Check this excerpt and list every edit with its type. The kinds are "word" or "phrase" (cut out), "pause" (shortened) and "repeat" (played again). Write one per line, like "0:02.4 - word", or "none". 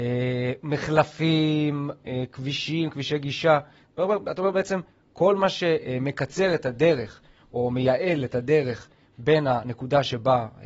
none